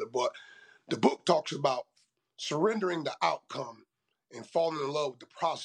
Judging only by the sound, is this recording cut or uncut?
uncut